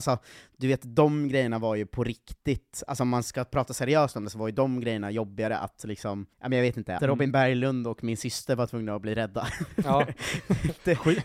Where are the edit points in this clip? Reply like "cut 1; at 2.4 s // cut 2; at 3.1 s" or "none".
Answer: cut 1; at 6.3 s // cut 2; at 7.0 s